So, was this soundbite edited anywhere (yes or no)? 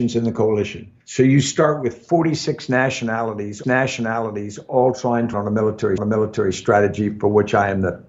yes